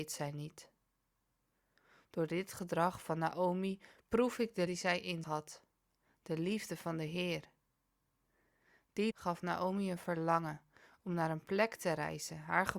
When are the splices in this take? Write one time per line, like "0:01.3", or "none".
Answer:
0:04.7
0:05.2
0:09.1